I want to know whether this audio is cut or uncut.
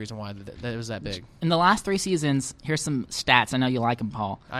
uncut